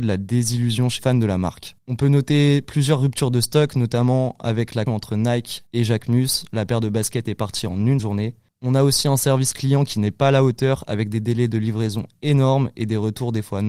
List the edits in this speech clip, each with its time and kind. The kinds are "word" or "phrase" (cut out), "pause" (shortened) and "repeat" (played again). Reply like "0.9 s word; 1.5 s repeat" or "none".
1.0 s word; 1.8 s pause; 4.9 s word; 5.7 s pause; 8.0 s word